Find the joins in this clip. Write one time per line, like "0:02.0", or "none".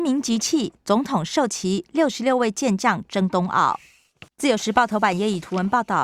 0:04.3

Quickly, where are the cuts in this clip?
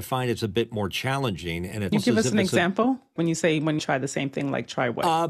0:01.9
0:03.2
0:03.8

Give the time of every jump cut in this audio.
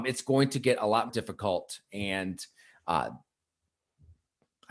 0:01.1

